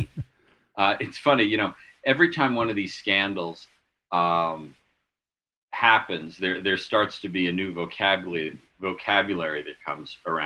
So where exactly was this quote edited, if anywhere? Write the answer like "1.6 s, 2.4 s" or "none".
none